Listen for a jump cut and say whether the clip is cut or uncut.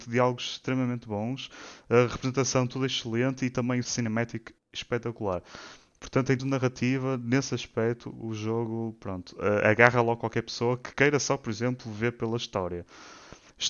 cut